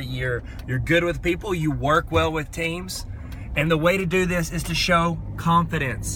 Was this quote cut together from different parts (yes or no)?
no